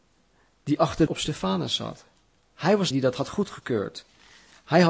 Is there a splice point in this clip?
yes; 2 cuts; at 1.1 s, 2.9 s

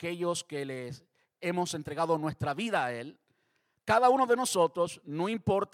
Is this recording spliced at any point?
no; 0 cuts

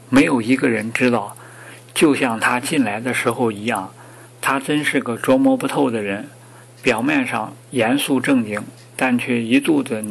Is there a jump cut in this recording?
no; 0 cuts

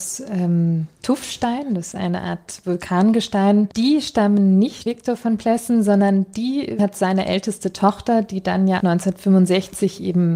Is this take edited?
yes; 5 cuts; at 1.9 s, 3.7 s, 4.9 s, 6.8 s, 8.8 s

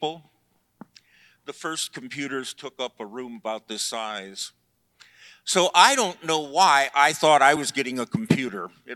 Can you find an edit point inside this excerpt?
no; 0 cuts

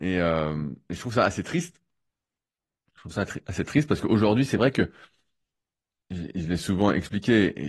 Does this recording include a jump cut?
no; 0 cuts

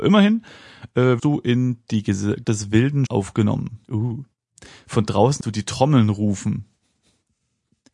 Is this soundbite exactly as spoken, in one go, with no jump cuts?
no; 5 cuts; at 1.2 s, 2.4 s, 3.1 s, 3.8 s, 5.4 s

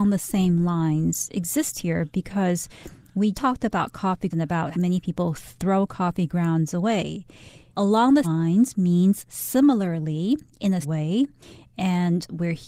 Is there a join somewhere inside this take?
yes; 5 cuts; at 3.3 s, 4.3 s, 4.7 s, 8.2 s, 10.8 s

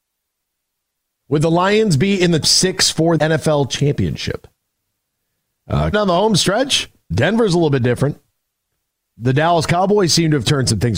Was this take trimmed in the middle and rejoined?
yes; 4 cuts; at 2.4 s, 3.2 s, 5.9 s, 7.1 s

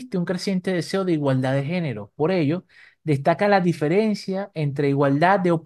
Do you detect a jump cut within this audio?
no; 0 cuts

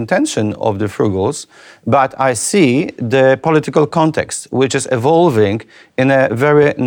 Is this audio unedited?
yes; 0 cuts

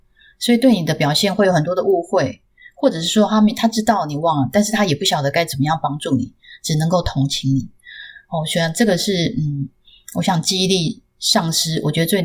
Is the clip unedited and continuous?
yes; 0 cuts

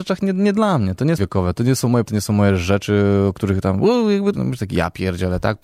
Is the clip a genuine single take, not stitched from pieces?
no; 3 cuts; at 1.2 s, 2.0 s, 4.3 s

